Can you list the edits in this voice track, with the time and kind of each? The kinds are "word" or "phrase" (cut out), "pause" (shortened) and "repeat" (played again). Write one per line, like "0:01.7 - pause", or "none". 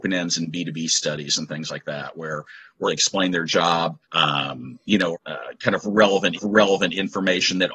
0:02.9 - phrase
0:04.0 - pause
0:05.1 - phrase
0:06.4 - repeat